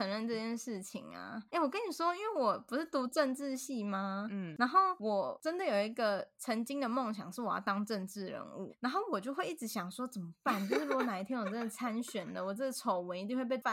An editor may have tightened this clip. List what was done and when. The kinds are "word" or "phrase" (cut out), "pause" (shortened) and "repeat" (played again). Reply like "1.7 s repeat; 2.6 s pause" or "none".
1.5 s pause; 8.7 s word